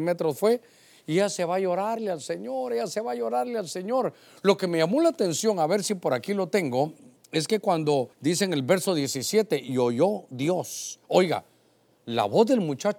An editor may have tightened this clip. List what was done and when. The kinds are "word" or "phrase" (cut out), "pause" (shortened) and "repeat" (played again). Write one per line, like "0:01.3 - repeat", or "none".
0:08.1 - pause